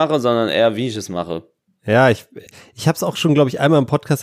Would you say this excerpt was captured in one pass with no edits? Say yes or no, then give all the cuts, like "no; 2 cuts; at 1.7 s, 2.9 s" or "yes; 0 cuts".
yes; 0 cuts